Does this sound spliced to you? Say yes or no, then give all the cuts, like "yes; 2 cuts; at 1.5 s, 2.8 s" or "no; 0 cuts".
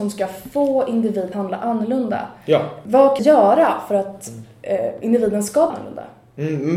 yes; 3 cuts; at 1.3 s, 3.2 s, 5.7 s